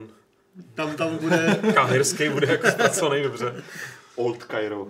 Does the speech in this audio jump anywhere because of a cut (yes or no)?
no